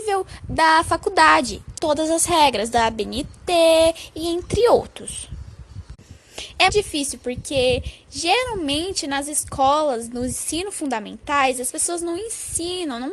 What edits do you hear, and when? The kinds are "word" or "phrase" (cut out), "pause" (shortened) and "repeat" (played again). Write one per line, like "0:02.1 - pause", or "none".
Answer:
0:01.8 - phrase
0:06.7 - word